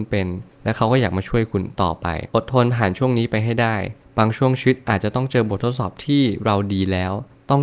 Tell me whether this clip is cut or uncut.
cut